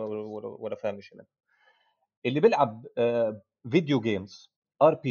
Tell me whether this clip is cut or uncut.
uncut